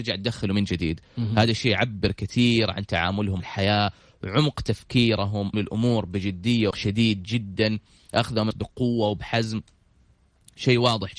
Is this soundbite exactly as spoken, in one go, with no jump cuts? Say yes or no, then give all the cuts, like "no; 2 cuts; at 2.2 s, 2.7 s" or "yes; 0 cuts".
no; 4 cuts; at 3.4 s, 5.5 s, 6.7 s, 8.5 s